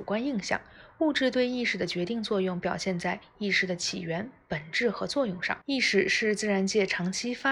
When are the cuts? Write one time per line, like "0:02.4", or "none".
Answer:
0:05.6